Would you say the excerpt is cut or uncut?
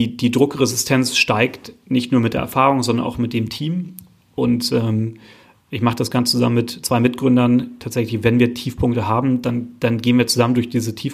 uncut